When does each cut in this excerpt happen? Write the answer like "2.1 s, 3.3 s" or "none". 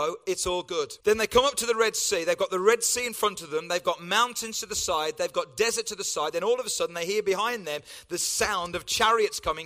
1.0 s